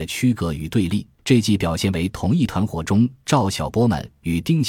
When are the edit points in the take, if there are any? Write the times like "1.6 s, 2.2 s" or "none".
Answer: 1.2 s

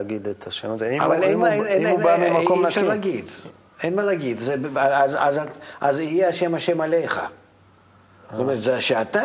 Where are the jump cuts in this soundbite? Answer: none

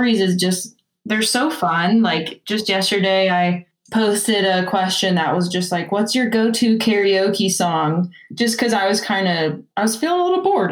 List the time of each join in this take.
9.7 s

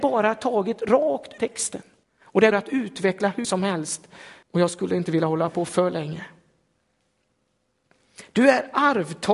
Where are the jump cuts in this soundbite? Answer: 1.4 s, 2.0 s, 2.5 s, 3.4 s, 4.4 s

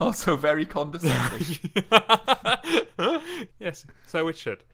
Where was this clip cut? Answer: 3.5 s

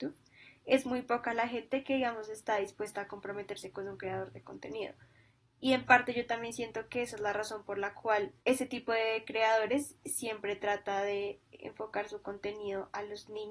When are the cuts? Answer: 8.4 s

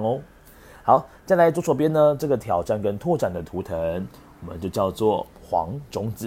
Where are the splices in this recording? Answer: 5.3 s

